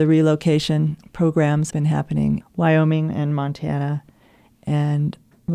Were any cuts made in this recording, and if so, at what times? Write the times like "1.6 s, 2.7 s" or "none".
1.0 s, 1.7 s, 2.4 s